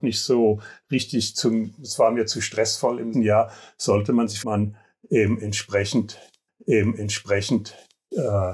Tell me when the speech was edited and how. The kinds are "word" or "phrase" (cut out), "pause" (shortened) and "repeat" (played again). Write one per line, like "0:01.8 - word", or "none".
0:03.1 - word
0:04.4 - phrase
0:06.5 - repeat